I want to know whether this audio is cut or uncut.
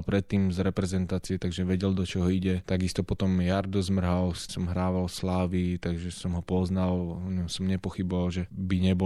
cut